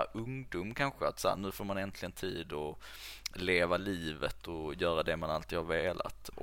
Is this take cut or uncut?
uncut